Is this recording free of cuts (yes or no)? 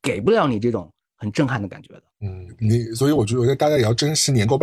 no